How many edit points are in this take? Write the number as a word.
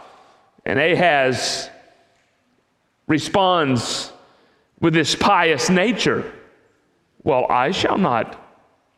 zero